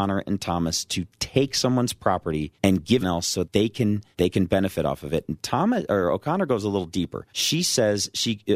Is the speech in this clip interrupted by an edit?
yes; 5 cuts; at 2.6 s, 3.0 s, 3.4 s, 4.1 s, 7.3 s

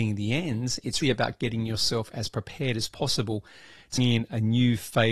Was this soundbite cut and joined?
yes; 2 cuts; at 1.0 s, 4.0 s

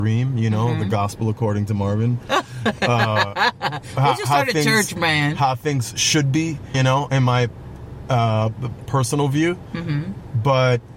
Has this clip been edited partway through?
yes; 2 cuts; at 6.7 s, 8.9 s

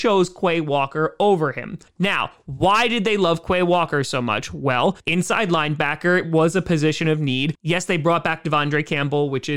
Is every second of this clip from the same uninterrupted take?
no; 2 cuts; at 1.9 s, 5.0 s

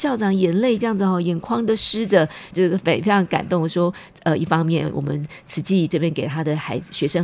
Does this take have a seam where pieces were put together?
yes; 1 cut; at 2.5 s

